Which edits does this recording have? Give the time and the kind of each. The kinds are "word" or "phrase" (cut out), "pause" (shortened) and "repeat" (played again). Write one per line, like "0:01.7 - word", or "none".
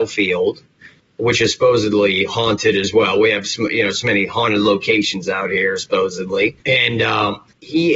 0:06.6 - pause